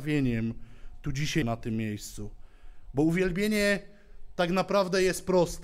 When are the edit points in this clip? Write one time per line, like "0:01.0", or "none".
0:01.4